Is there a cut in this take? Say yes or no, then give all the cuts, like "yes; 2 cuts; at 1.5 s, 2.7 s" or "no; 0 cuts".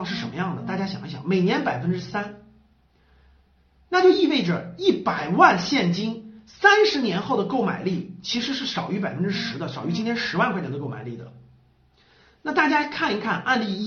no; 0 cuts